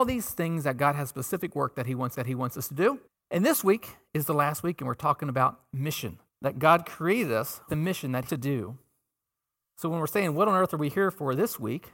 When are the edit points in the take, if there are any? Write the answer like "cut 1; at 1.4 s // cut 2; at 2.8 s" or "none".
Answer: cut 1; at 2.1 s // cut 2; at 3.1 s // cut 3; at 6.3 s // cut 4; at 7.7 s // cut 5; at 8.3 s